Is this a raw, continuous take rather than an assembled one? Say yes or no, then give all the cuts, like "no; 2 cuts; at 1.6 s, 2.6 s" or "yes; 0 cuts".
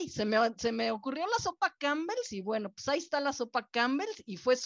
yes; 0 cuts